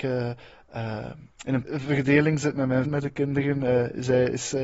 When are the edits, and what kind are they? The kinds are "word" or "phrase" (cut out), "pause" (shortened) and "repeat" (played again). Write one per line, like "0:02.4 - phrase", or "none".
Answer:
0:01.3 - pause
0:01.7 - word
0:02.9 - word